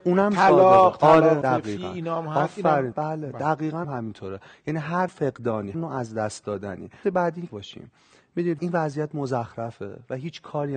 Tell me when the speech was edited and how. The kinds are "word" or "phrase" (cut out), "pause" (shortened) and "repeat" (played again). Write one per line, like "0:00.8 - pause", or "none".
0:01.4 - word
0:02.9 - word
0:03.8 - word
0:05.1 - word
0:05.7 - word
0:07.0 - word
0:07.5 - word
0:08.6 - word